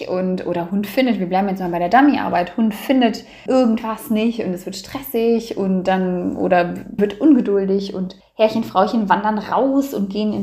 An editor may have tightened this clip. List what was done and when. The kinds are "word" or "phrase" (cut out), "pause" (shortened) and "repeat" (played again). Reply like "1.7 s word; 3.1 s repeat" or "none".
3.5 s word; 7.0 s word; 8.2 s pause